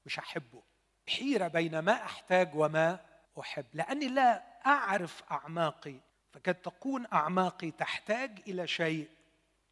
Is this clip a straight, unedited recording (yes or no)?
no